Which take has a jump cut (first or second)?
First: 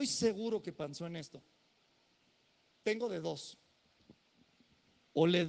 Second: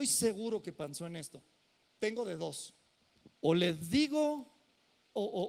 second